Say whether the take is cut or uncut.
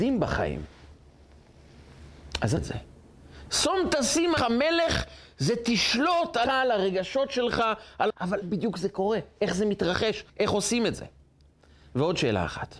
cut